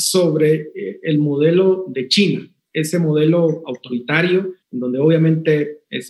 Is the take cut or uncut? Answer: cut